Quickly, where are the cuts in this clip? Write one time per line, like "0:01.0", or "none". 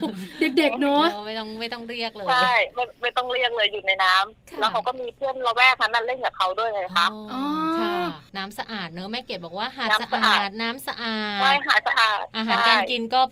0:03.0